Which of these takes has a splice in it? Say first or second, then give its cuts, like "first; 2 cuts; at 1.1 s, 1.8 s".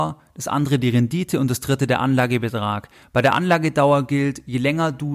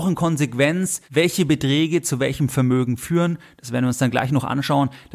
second; 1 cut; at 1.0 s